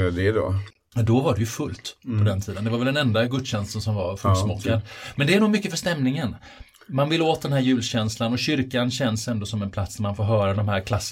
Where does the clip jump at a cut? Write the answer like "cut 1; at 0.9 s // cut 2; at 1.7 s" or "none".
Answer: none